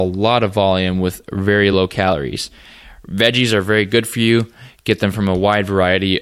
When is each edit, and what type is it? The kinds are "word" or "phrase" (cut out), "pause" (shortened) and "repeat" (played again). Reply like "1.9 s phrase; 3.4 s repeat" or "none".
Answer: none